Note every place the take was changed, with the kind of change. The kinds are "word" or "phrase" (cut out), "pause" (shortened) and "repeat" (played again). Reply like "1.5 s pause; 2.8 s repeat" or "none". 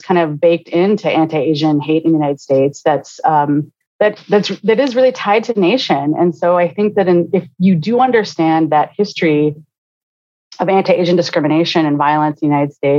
3.8 s pause